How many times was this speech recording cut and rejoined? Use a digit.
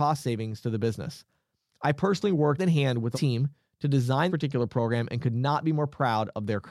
3